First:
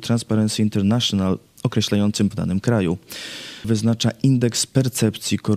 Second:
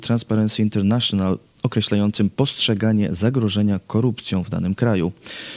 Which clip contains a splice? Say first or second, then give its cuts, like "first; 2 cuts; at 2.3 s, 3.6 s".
first; 2 cuts; at 2.3 s, 3.6 s